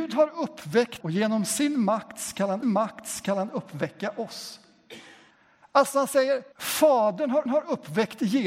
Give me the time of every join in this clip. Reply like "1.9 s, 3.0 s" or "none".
1.0 s, 2.6 s, 5.3 s, 6.5 s, 7.5 s